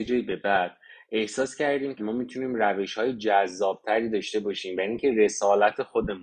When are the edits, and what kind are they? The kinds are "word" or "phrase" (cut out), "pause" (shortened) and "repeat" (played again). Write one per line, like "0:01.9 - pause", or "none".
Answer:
0:02.0 - word